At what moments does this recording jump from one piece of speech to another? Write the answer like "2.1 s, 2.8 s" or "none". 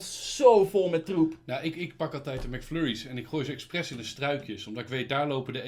none